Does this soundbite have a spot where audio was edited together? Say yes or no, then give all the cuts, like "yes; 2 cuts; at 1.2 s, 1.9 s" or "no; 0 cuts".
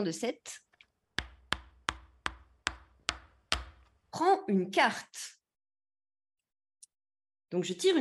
no; 0 cuts